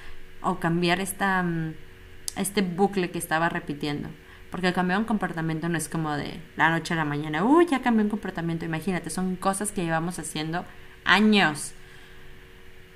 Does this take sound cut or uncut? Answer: uncut